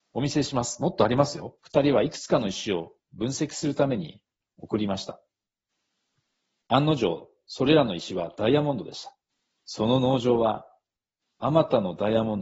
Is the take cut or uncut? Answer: cut